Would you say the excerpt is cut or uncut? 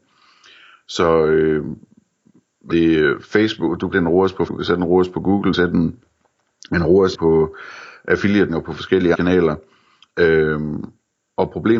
cut